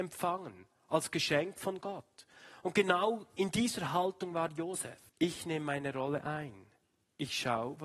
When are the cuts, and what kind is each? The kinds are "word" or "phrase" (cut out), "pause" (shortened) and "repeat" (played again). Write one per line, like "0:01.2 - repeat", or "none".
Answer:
0:05.1 - pause